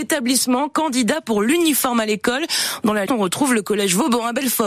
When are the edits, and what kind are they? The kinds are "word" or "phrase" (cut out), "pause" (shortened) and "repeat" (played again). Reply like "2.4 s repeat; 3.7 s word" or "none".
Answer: 3.1 s word